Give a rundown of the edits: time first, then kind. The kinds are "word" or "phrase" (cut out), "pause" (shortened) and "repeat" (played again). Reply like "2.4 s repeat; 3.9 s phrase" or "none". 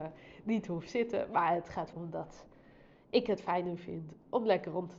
1.9 s word

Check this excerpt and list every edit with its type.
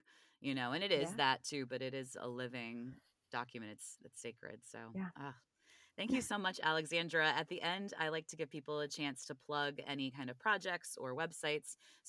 4.0 s word

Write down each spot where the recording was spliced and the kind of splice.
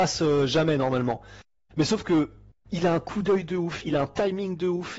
none

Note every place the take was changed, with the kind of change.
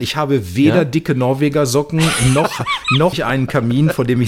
3.1 s word

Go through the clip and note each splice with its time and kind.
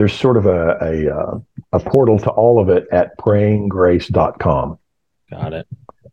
1.7 s pause

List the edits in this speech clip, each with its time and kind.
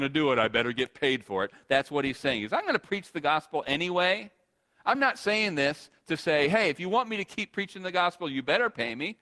none

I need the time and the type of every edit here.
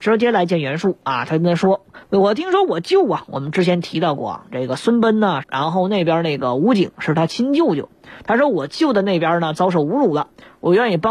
2.0 s pause; 5.4 s phrase

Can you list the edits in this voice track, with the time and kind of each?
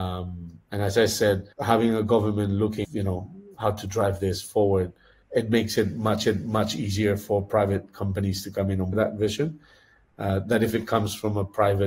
1.5 s pause; 2.8 s word; 5.2 s word; 6.2 s repeat; 8.9 s phrase

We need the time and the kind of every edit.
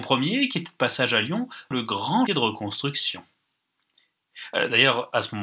1.7 s word; 2.3 s word

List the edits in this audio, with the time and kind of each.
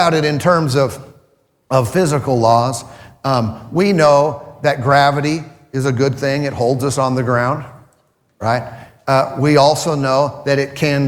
none

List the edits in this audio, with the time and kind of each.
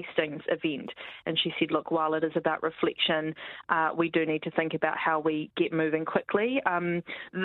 none

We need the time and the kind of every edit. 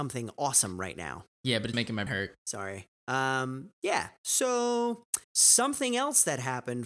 1.7 s word; 2.1 s word; 5.2 s pause

